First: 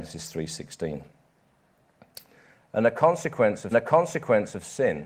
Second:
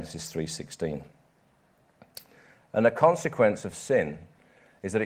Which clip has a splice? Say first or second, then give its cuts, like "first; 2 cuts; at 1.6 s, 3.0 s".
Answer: first; 1 cut; at 3.7 s